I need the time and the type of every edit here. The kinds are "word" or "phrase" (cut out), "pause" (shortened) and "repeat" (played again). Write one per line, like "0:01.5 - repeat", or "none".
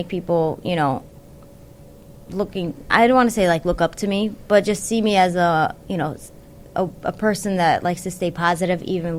none